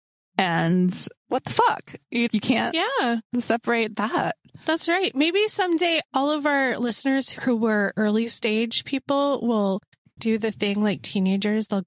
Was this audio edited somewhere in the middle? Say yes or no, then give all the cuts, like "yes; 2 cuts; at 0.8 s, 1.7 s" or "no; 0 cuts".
yes; 5 cuts; at 1.2 s, 2.3 s, 4.6 s, 6.0 s, 10.2 s